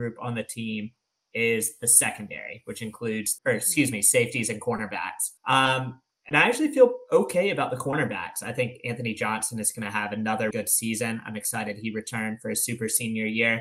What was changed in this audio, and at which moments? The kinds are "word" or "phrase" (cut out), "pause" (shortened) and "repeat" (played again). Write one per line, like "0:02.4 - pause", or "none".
0:03.4 - phrase
0:05.4 - pause
0:10.5 - word